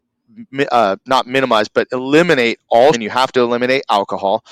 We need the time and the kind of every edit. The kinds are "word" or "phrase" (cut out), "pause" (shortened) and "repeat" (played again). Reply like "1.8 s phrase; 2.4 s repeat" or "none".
2.9 s word